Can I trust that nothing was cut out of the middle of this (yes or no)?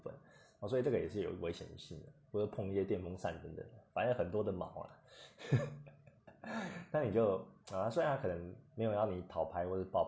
no